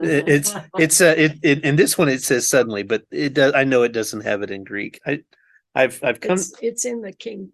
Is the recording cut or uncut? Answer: uncut